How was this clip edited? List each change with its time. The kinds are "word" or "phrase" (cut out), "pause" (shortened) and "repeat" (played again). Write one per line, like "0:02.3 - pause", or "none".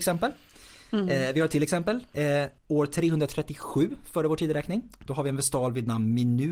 0:02.6 - pause